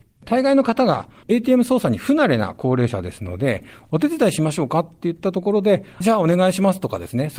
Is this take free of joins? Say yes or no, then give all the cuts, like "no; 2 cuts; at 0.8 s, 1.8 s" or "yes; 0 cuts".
no; 1 cut; at 6.0 s